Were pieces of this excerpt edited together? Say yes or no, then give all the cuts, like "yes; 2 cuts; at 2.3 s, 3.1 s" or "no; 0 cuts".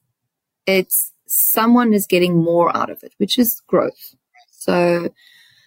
no; 0 cuts